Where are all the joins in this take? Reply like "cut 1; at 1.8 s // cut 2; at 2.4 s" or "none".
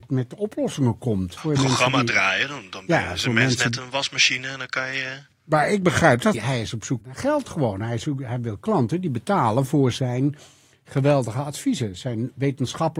cut 1; at 1.4 s // cut 2; at 6.3 s // cut 3; at 7.0 s